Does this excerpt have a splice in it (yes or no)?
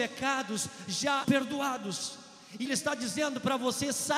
yes